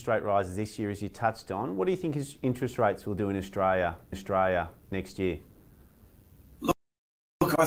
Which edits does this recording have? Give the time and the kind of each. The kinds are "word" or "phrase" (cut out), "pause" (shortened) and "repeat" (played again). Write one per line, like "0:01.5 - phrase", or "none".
0:04.1 - repeat

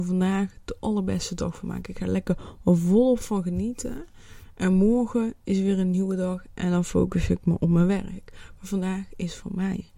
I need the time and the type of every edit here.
none

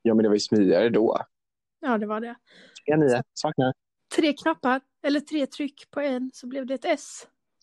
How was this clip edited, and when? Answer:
0:03.9 - pause

